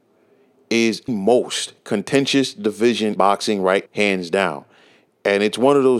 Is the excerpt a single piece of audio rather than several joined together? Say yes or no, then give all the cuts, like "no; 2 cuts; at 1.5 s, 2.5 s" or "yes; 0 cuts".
no; 3 cuts; at 1.1 s, 3.2 s, 3.9 s